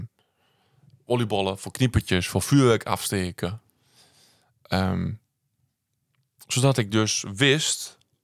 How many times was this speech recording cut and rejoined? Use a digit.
0